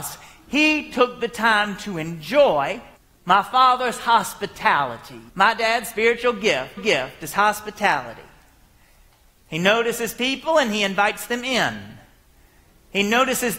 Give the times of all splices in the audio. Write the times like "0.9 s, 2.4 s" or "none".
3.0 s, 5.3 s, 6.8 s